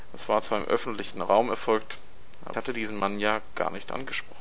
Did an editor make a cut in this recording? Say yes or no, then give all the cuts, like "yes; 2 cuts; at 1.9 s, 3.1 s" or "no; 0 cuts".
yes; 1 cut; at 2.5 s